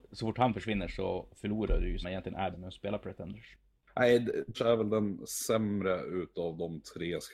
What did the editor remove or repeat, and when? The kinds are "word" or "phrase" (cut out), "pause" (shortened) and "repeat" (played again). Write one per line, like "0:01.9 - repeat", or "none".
0:02.0 - phrase
0:02.5 - word
0:04.5 - word